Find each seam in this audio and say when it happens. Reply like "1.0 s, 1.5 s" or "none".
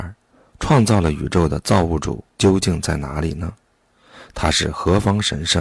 2.3 s